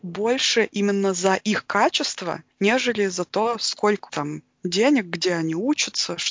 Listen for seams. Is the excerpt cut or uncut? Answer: cut